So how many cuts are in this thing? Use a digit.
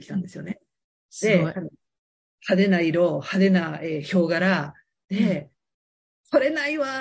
0